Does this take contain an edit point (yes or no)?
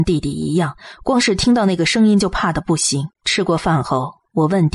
yes